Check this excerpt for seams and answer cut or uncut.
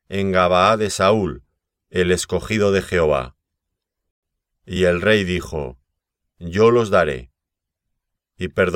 uncut